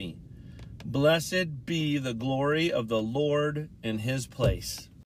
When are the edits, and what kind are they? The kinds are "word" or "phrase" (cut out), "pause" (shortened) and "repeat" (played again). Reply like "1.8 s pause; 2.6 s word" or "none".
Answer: none